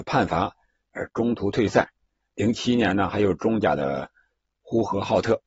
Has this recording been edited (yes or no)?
no